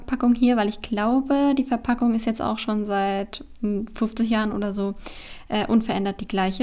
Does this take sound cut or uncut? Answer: uncut